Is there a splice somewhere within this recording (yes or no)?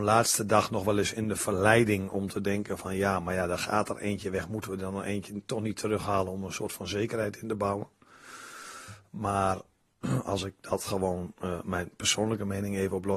no